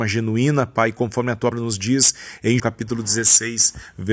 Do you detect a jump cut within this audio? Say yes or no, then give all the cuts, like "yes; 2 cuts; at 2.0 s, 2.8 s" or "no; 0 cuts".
yes; 2 cuts; at 1.5 s, 2.6 s